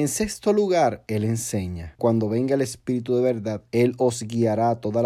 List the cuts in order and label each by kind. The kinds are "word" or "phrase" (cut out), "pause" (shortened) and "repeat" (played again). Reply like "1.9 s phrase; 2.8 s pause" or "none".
2.0 s word